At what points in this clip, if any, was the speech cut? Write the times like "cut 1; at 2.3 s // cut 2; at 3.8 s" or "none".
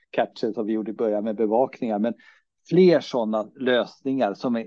none